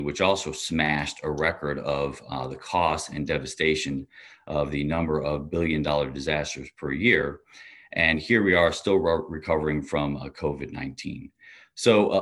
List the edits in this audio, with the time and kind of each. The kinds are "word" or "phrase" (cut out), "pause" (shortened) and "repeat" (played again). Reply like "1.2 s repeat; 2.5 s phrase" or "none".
none